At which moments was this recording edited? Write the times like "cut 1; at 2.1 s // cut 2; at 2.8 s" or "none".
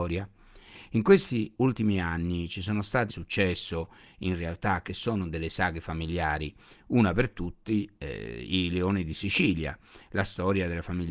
cut 1; at 3.1 s